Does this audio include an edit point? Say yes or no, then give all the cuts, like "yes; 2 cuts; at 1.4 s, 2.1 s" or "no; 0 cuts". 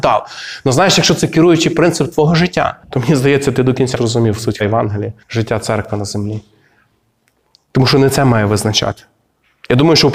yes; 4 cuts; at 2.8 s, 3.9 s, 4.6 s, 5.2 s